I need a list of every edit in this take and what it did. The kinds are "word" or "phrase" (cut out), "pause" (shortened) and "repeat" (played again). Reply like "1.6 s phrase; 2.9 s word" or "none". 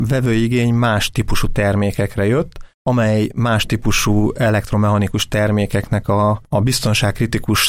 2.7 s pause

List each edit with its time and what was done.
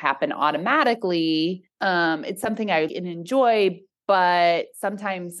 1.7 s pause; 2.9 s word

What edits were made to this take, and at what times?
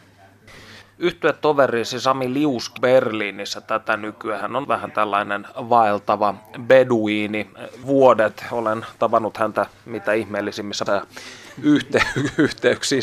2.8 s word; 4.6 s word; 7.8 s word; 10.9 s word

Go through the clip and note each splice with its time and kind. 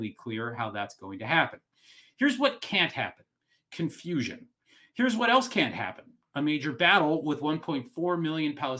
none

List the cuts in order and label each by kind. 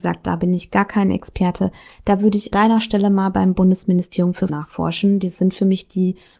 2.5 s word; 4.5 s word

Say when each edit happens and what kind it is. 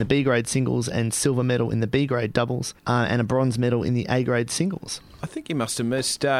2.8 s pause

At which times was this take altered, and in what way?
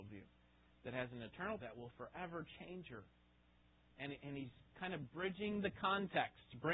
1.6 s word

